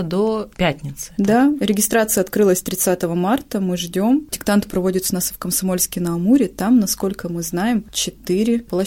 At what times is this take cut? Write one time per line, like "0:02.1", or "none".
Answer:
none